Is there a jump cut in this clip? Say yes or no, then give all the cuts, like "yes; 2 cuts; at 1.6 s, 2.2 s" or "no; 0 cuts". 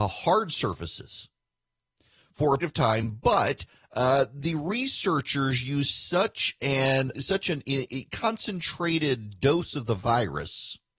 yes; 2 cuts; at 2.6 s, 7.1 s